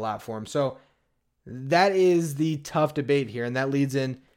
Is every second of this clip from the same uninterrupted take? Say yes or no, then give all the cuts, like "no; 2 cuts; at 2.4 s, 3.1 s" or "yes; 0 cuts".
yes; 0 cuts